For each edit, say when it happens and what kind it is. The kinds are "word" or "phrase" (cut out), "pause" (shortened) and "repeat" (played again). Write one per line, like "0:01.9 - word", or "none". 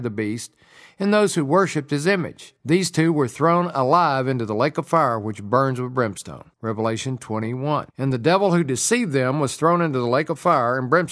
0:02.6 - pause
0:06.5 - pause
0:07.9 - pause